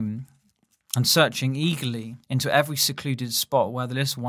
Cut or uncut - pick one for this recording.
cut